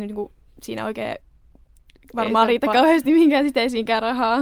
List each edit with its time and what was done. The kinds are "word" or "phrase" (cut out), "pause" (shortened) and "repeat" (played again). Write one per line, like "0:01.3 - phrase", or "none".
none